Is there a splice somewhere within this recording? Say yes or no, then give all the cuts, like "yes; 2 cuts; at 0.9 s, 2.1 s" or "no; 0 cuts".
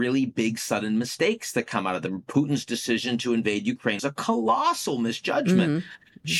yes; 1 cut; at 4.0 s